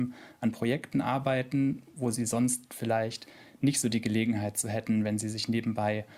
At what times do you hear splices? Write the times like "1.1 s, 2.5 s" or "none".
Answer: none